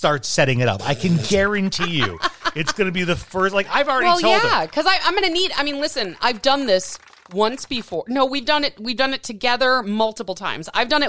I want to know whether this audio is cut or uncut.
uncut